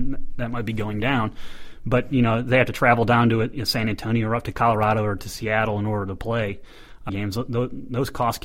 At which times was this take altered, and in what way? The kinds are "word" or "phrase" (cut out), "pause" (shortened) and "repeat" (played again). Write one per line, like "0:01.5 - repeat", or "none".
0:07.1 - word